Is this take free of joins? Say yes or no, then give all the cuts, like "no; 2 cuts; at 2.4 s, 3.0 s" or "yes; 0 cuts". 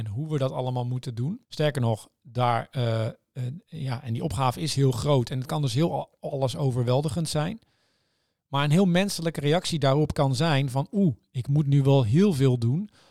no; 1 cut; at 1.4 s